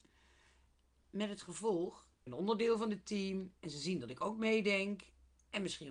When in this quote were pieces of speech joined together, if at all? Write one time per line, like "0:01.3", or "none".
0:02.3